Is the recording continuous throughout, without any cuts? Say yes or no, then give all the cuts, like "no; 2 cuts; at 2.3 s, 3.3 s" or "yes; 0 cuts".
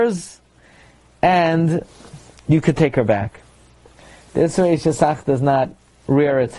yes; 0 cuts